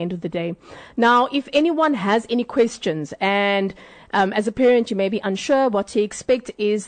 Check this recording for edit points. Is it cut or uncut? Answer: uncut